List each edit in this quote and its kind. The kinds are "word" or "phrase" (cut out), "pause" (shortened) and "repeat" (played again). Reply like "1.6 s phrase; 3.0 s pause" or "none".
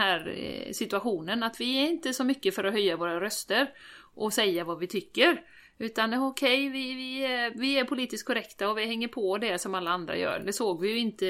none